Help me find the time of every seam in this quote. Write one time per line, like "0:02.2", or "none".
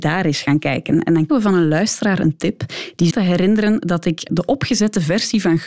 0:01.3
0:03.1
0:04.3